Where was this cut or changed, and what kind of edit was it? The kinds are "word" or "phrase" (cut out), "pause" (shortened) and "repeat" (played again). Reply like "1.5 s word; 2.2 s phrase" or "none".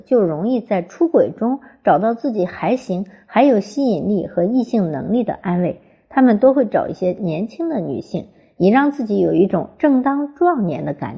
none